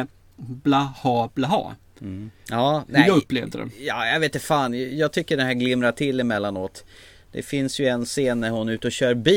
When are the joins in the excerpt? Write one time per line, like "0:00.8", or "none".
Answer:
none